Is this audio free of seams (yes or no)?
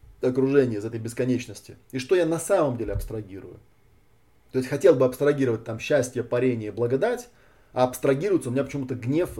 yes